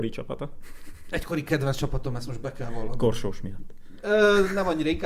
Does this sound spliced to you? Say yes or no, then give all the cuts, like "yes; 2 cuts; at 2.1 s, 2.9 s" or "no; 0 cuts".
no; 0 cuts